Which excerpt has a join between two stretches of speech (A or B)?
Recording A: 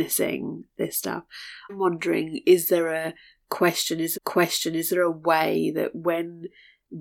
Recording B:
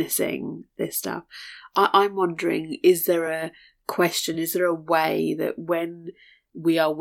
A